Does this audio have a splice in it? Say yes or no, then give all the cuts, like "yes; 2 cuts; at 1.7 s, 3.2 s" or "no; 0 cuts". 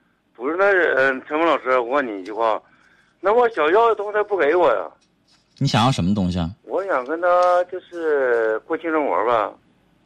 yes; 1 cut; at 6.6 s